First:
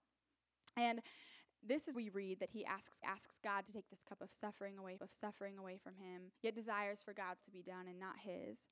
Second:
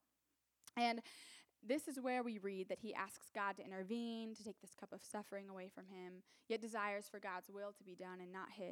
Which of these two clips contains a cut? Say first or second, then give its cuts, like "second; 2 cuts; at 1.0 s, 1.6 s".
first; 6 cuts; at 1.9 s, 3.0 s, 3.7 s, 5.0 s, 6.4 s, 7.4 s